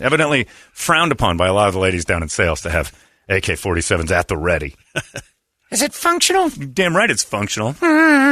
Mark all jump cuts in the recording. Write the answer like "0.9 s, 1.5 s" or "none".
none